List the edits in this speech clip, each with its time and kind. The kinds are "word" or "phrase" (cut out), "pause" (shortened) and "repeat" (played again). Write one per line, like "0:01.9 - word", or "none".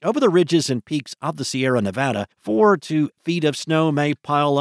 0:02.3 - pause
0:03.1 - word